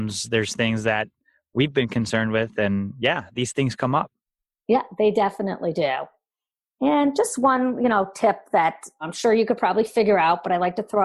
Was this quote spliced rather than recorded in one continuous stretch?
no; 0 cuts

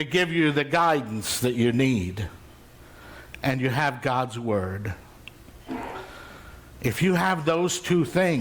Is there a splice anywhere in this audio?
no; 0 cuts

